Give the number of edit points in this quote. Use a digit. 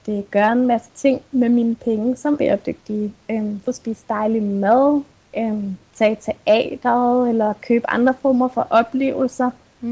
3